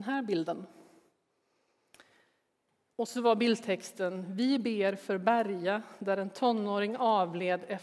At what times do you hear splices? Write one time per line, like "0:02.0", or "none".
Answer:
none